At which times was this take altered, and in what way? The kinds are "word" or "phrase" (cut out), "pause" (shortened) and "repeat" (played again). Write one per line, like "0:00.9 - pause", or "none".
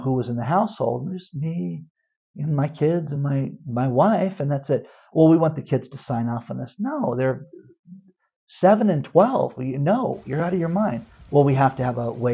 none